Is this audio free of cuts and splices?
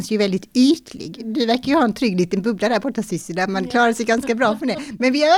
yes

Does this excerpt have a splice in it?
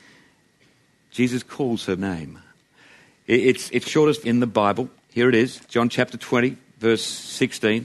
yes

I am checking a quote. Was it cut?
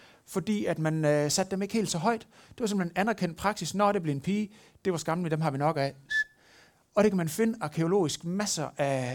no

